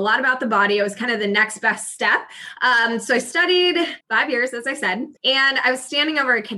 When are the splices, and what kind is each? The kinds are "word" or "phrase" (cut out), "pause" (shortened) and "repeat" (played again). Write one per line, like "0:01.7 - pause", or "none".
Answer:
0:04.0 - pause
0:05.2 - pause